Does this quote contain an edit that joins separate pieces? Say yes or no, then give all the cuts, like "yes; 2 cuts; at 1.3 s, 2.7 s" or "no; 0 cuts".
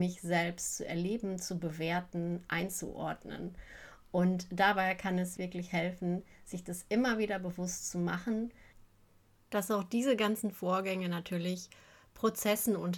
yes; 1 cut; at 5.4 s